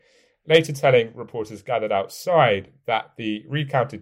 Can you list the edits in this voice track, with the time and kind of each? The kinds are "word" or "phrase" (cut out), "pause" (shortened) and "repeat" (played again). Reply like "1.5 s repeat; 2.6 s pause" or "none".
none